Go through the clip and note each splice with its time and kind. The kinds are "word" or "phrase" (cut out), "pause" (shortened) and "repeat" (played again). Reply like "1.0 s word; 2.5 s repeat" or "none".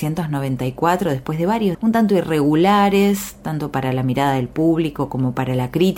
1.7 s word